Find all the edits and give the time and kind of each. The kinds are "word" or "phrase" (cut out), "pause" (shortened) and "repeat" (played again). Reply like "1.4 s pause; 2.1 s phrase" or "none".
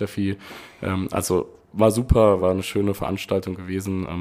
none